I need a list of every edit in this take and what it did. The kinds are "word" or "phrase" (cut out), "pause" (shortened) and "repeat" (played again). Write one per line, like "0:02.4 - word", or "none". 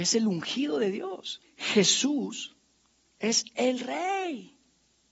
0:01.4 - pause